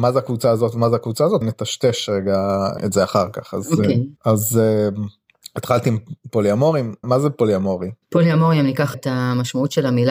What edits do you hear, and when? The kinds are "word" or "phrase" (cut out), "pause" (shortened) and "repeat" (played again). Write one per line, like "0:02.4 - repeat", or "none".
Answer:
0:01.4 - word
0:02.8 - word
0:04.2 - pause
0:07.0 - word
0:08.0 - pause
0:08.9 - word